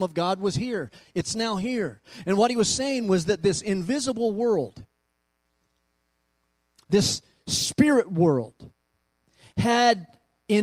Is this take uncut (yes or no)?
yes